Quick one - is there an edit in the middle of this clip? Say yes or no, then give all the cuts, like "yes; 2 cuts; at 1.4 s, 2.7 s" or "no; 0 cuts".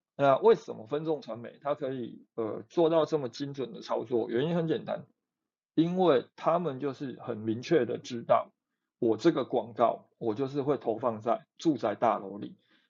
no; 0 cuts